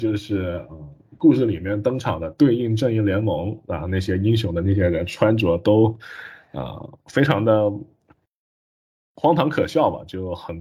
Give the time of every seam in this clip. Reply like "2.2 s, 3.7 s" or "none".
none